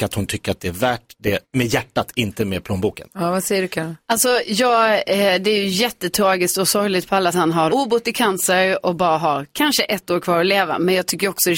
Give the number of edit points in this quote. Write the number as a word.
three